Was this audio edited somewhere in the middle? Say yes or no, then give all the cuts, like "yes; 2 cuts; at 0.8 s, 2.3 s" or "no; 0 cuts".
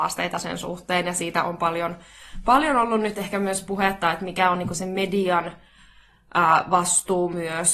no; 0 cuts